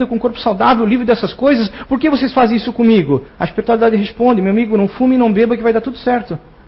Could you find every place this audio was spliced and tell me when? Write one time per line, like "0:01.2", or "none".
0:03.3